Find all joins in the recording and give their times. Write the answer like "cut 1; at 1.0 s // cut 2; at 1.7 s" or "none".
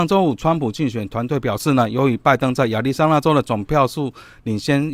none